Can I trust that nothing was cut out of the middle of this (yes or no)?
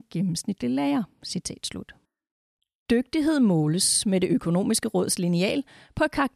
yes